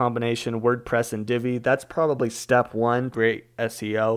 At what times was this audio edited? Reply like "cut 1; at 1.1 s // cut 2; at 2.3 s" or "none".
cut 1; at 3.1 s